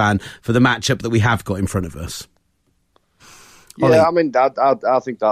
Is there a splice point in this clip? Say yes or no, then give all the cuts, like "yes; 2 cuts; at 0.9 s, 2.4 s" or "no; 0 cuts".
no; 0 cuts